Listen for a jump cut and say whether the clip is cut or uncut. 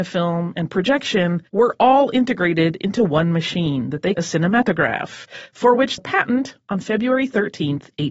cut